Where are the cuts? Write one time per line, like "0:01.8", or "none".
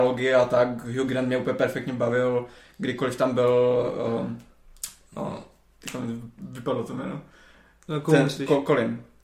none